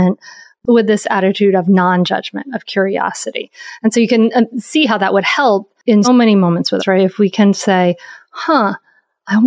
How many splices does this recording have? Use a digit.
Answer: 2